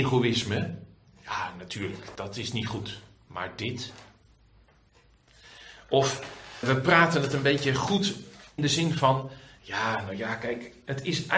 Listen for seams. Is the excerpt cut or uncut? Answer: cut